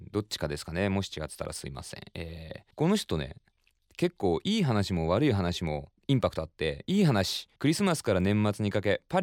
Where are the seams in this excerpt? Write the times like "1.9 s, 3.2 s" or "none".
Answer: 2.7 s, 6.0 s, 7.6 s